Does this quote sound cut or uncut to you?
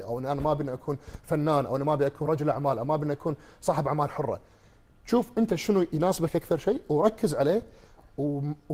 uncut